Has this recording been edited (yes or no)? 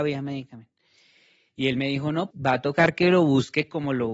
yes